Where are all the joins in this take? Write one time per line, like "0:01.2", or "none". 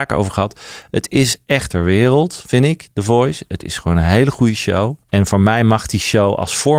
0:01.7
0:05.0